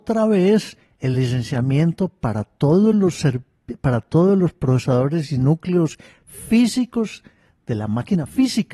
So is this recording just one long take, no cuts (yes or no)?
yes